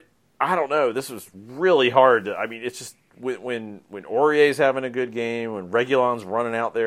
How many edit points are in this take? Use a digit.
0